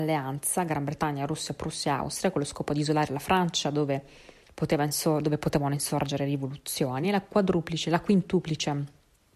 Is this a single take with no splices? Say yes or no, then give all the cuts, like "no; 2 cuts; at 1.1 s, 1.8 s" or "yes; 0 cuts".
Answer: yes; 0 cuts